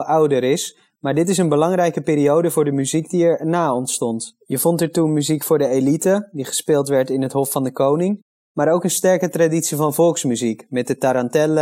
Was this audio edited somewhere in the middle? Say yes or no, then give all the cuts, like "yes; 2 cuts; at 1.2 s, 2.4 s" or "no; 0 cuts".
no; 0 cuts